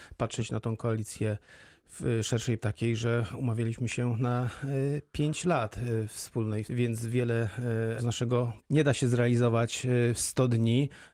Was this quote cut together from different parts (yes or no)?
yes